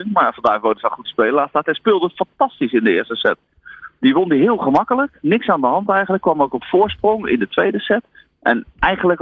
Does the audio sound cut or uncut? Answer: uncut